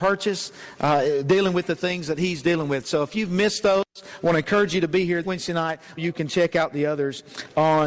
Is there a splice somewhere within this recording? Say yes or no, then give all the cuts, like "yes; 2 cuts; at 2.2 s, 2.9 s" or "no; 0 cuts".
yes; 2 cuts; at 5.2 s, 6.0 s